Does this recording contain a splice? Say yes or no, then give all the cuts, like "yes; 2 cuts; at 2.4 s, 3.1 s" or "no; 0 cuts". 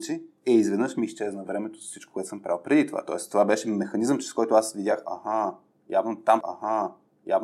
yes; 1 cut; at 6.4 s